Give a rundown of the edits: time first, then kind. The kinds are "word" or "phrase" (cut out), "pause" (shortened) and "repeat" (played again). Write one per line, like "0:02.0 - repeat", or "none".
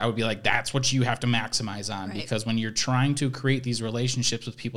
none